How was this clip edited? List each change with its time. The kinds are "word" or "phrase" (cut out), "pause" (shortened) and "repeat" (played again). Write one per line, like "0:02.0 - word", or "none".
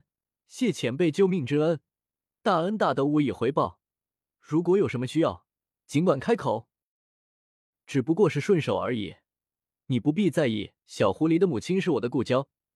0:10.8 - pause